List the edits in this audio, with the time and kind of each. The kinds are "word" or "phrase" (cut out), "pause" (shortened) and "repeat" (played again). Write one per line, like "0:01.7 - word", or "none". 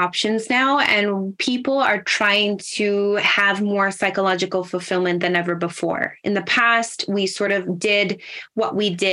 none